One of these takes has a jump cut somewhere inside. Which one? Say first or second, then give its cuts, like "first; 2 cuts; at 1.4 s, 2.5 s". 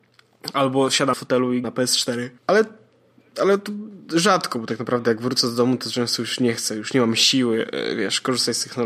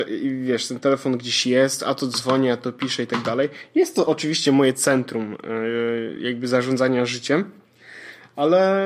first; 3 cuts; at 1.1 s, 1.6 s, 2.4 s